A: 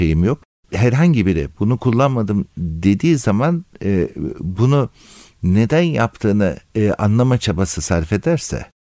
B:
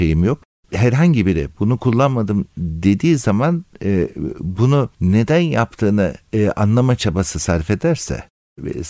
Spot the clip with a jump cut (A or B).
B